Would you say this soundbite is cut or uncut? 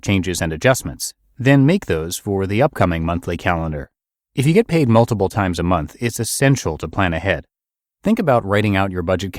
uncut